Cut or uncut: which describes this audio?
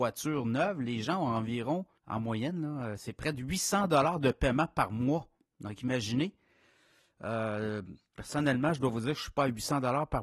cut